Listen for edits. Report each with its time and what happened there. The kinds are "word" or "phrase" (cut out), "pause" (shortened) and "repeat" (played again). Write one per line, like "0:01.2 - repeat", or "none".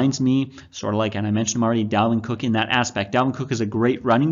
none